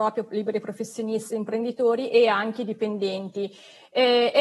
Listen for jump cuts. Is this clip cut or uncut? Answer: uncut